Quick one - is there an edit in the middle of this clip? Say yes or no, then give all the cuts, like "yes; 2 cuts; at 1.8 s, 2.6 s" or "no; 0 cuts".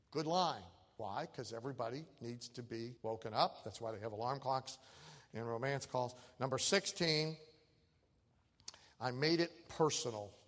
yes; 1 cut; at 3.0 s